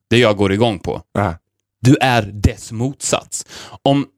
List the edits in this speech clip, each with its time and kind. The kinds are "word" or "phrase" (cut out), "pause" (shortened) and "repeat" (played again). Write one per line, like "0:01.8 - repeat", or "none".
none